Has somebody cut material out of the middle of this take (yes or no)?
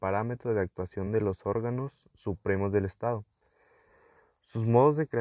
no